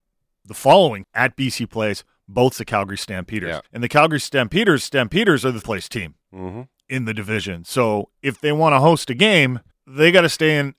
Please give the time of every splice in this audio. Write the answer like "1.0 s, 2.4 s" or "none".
1.0 s, 2.5 s, 3.7 s, 4.8 s, 5.6 s, 9.7 s